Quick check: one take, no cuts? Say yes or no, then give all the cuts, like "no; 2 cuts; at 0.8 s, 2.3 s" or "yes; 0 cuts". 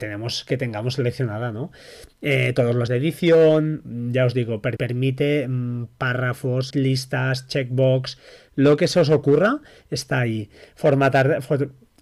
no; 3 cuts; at 2.9 s, 4.8 s, 6.7 s